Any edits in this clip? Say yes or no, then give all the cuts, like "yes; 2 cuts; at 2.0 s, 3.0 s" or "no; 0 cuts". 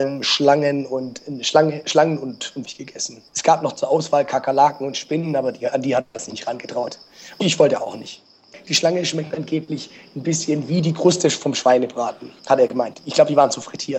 yes; 4 cuts; at 2.6 s, 3.3 s, 7.4 s, 12.4 s